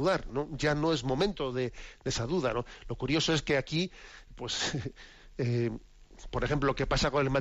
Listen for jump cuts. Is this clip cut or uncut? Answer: uncut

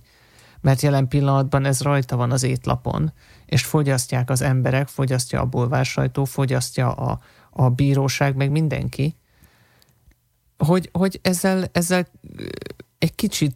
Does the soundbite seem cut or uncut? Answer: uncut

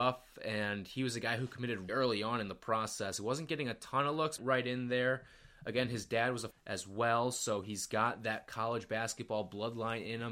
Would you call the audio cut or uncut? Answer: cut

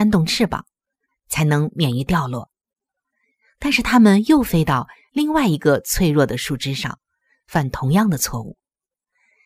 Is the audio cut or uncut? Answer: uncut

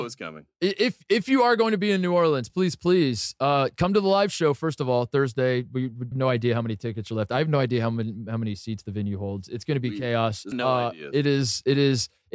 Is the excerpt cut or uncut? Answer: cut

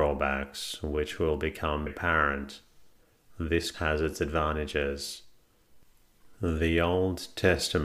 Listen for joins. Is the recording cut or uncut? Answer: cut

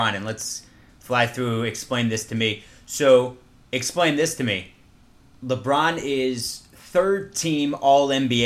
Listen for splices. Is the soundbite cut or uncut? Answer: uncut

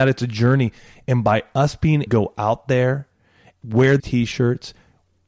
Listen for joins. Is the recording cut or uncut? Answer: cut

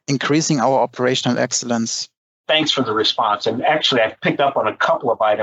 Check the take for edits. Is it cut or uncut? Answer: uncut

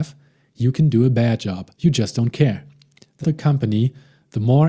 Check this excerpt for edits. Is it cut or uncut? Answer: cut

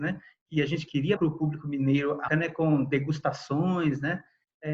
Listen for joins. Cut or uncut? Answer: cut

